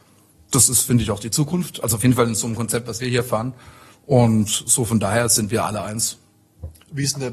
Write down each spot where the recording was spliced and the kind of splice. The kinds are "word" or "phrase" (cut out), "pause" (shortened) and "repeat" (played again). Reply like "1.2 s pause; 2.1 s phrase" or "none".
none